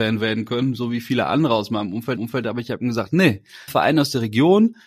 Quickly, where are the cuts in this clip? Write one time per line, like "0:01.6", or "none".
0:02.2
0:03.7